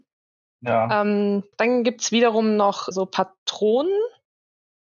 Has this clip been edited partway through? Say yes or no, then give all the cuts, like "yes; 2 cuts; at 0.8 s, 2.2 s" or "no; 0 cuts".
yes; 2 cuts; at 1.5 s, 2.9 s